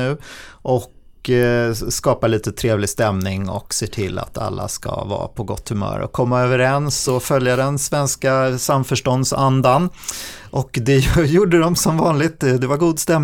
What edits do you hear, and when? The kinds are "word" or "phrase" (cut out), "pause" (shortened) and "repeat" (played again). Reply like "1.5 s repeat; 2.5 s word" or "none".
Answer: none